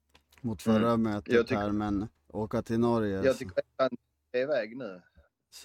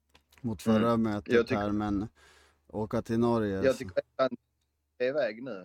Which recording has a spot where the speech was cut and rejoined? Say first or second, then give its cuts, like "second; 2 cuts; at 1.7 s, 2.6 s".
first; 2 cuts; at 2.2 s, 4.1 s